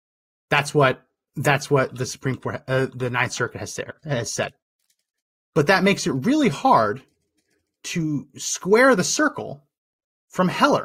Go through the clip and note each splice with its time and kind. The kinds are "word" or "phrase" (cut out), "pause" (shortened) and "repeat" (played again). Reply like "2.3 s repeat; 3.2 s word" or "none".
none